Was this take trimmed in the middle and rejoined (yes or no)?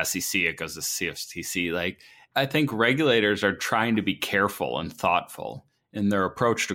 no